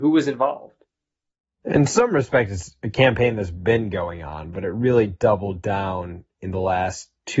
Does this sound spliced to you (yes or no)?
no